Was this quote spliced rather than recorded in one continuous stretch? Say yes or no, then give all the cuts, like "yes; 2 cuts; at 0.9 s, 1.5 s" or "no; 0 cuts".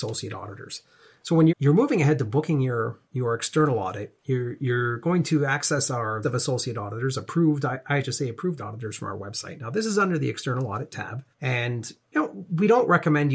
yes; 6 cuts; at 1.5 s, 3.0 s, 4.2 s, 6.2 s, 8.6 s, 11.3 s